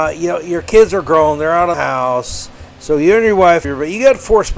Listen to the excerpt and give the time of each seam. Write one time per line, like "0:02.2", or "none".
0:01.7
0:03.6